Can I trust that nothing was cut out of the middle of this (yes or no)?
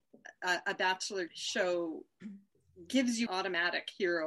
no